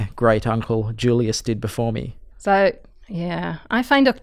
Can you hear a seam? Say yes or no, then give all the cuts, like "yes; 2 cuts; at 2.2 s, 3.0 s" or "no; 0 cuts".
yes; 1 cut; at 2.3 s